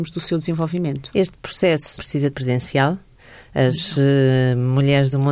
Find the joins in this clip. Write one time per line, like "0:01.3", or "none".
0:02.0
0:02.3